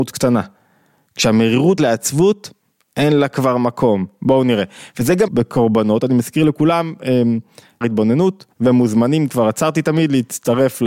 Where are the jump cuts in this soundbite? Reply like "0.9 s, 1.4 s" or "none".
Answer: 1.8 s, 5.3 s, 7.8 s, 8.5 s